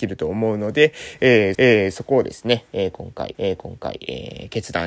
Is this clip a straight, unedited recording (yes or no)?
no